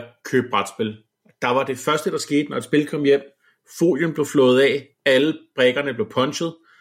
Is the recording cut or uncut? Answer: uncut